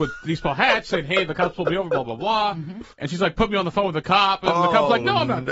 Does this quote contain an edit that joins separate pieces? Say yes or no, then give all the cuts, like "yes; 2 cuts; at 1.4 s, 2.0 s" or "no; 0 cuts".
yes; 1 cut; at 2.9 s